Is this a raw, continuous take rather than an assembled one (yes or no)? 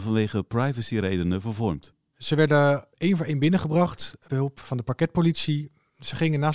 no